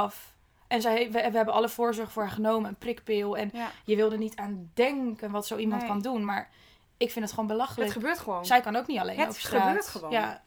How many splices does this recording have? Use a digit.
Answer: 0